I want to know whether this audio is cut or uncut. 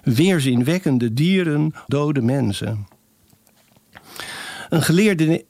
cut